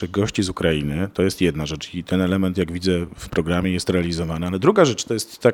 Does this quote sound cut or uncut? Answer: uncut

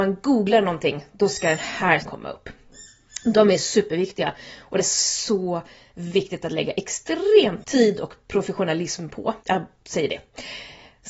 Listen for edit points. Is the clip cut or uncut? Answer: cut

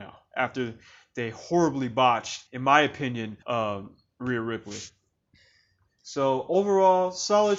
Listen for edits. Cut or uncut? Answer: cut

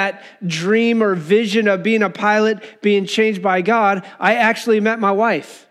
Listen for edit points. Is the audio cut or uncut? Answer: uncut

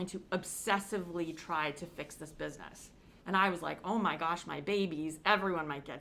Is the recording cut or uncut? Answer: cut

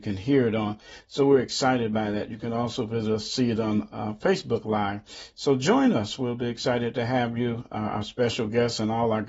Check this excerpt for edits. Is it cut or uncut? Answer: uncut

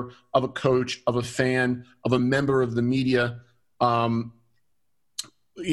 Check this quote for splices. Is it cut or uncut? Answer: uncut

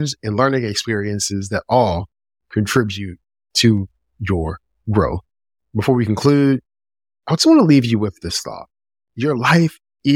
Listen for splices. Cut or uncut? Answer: uncut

